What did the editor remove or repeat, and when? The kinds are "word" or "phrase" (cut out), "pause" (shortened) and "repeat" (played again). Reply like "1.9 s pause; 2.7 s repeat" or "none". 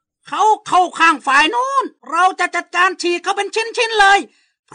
2.0 s pause